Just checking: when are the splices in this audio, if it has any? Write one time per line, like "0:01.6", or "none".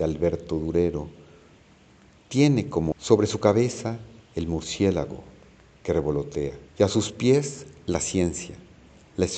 0:02.9
0:04.2
0:06.7